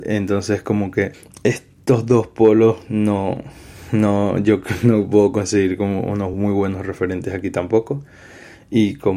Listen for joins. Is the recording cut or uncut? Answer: uncut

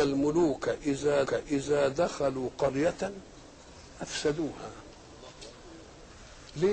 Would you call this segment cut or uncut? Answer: cut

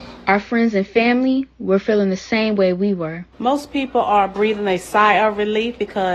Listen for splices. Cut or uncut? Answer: cut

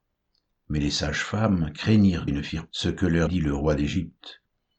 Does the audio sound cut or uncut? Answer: cut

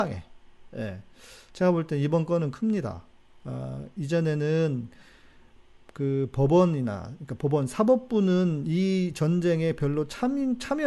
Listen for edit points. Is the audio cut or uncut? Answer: uncut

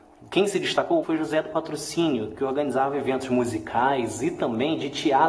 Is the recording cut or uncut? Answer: cut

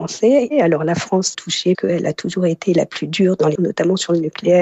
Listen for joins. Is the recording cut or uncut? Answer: cut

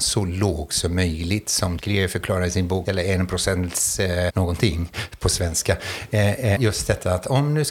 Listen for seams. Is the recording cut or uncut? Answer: cut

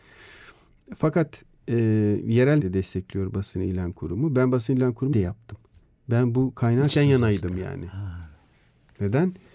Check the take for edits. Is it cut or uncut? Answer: cut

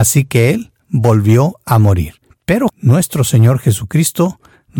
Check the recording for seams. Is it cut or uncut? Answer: cut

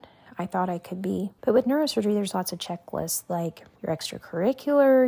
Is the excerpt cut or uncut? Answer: cut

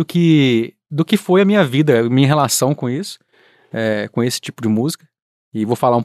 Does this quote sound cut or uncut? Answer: uncut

